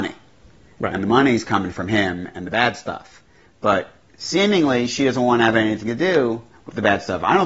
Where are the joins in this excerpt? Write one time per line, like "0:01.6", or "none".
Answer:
none